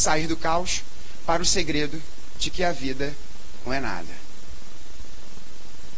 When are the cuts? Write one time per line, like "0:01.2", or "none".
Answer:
0:03.7